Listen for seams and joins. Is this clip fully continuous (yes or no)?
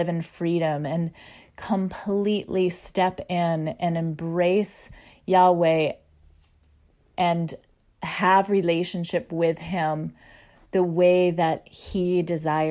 yes